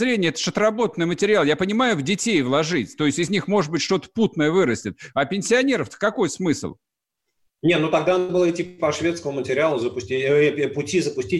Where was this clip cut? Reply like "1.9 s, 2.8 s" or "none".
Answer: none